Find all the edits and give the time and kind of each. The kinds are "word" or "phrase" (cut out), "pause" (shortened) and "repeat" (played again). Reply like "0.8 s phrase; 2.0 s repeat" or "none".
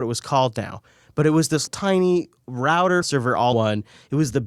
1.7 s word; 3.0 s word; 3.5 s word